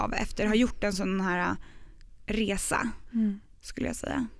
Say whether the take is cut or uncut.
uncut